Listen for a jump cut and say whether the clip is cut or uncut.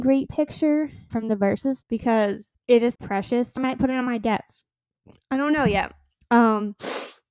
cut